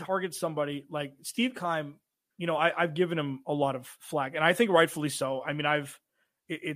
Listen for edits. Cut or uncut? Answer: uncut